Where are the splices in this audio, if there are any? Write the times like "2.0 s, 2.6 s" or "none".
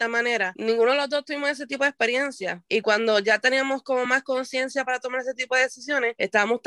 none